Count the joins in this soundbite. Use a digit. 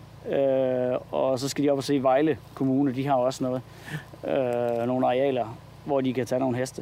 0